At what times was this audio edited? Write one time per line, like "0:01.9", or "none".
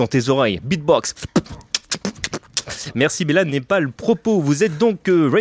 none